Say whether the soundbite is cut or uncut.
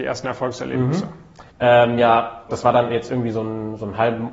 cut